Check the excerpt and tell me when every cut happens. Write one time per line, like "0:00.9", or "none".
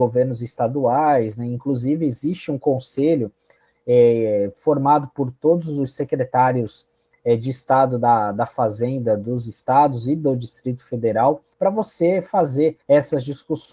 0:11.5
0:12.8